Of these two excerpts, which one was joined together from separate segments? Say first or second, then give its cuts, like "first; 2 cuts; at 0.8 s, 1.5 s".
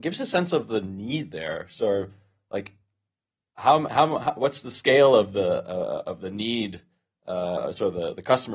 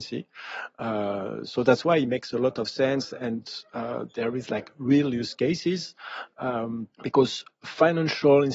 second; 1 cut; at 6.9 s